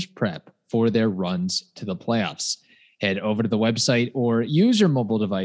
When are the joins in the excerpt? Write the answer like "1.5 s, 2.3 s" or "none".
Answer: none